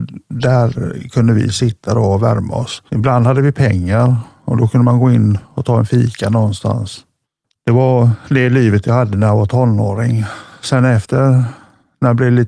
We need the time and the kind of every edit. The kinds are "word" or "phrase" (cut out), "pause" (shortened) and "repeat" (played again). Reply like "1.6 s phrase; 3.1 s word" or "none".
2.9 s pause; 7.2 s pause